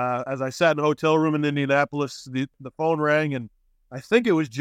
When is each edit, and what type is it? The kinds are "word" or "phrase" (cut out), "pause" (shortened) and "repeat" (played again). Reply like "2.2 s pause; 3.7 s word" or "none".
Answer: none